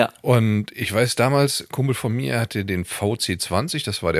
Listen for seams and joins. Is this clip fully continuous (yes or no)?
yes